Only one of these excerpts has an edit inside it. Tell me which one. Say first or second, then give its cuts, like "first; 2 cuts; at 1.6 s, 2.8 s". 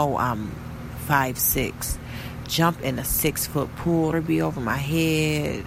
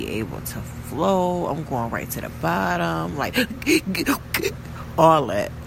first; 2 cuts; at 2.5 s, 4.1 s